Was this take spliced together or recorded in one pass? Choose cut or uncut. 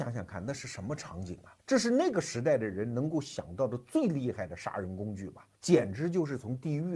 cut